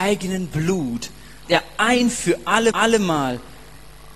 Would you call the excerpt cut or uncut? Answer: cut